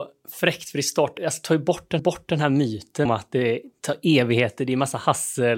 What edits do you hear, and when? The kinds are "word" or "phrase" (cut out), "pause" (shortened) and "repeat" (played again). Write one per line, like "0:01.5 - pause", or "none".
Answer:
0:01.2 - word
0:02.0 - repeat
0:03.1 - word

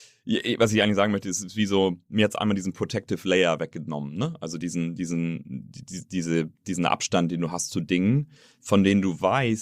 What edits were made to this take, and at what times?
none

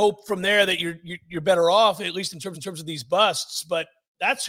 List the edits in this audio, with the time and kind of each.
0:02.5 - repeat

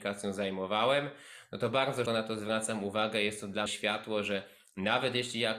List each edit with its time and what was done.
0:02.1 - word
0:03.7 - phrase

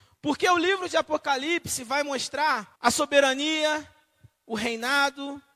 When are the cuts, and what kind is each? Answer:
0:02.8 - pause

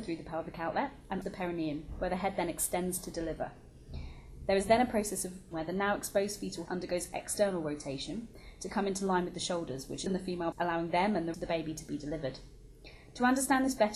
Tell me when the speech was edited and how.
0:01.2 - word
0:05.5 - word
0:06.7 - word
0:10.1 - word
0:10.5 - word
0:11.3 - word

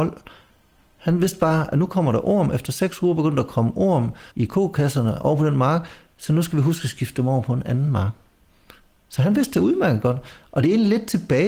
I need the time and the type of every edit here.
0:04.3 - pause

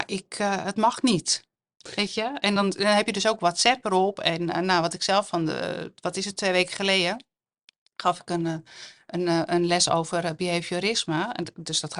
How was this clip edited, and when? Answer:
none

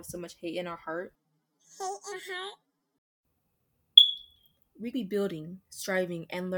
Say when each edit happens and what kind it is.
0:02.1 - word
0:04.9 - word

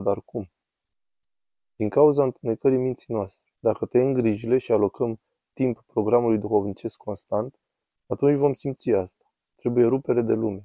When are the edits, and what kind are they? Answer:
0:03.6 - pause

